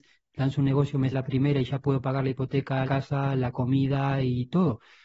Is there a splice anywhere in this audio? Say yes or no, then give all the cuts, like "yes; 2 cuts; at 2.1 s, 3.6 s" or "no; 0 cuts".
yes; 2 cuts; at 1.1 s, 2.8 s